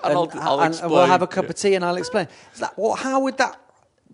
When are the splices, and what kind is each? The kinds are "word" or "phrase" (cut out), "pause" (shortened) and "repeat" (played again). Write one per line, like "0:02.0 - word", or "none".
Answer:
none

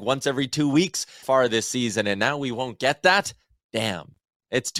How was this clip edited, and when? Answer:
0:01.2 - word

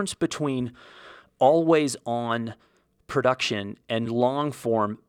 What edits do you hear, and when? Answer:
none

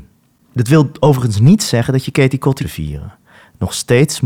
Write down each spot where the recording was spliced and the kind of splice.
0:02.6 - phrase

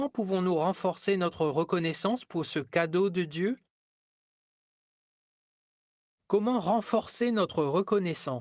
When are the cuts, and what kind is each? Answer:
none

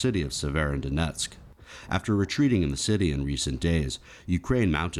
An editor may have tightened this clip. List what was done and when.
none

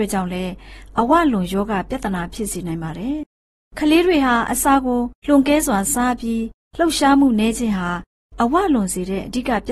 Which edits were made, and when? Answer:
0:05.2 - pause

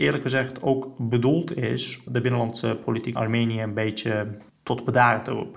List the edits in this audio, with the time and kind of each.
0:02.1 - word
0:03.1 - word

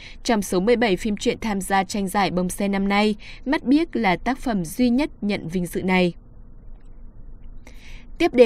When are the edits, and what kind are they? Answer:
none

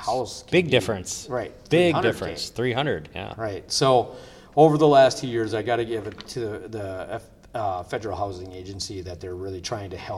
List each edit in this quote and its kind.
none

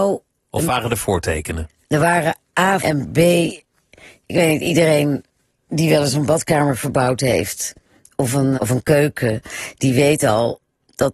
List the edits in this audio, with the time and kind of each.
0:02.8 - word
0:08.5 - word

